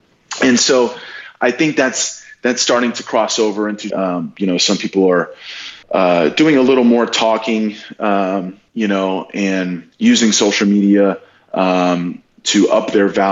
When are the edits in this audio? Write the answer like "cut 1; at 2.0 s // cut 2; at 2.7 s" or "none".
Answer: cut 1; at 3.9 s // cut 2; at 5.8 s // cut 3; at 8.7 s // cut 4; at 9.9 s